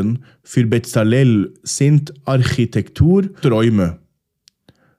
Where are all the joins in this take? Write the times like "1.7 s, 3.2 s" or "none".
3.4 s